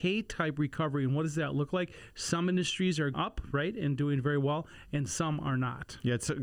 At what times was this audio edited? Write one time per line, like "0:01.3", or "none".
0:03.1